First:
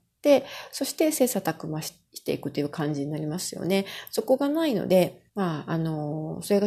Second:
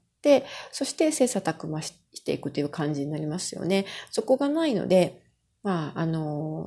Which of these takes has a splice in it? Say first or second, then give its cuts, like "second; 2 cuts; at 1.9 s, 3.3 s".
first; 1 cut; at 5.3 s